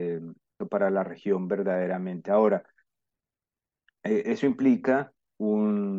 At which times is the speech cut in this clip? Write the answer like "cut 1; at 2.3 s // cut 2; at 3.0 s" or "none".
none